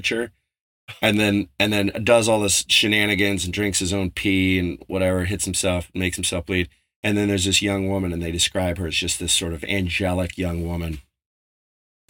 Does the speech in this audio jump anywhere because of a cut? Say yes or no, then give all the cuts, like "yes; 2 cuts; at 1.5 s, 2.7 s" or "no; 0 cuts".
no; 0 cuts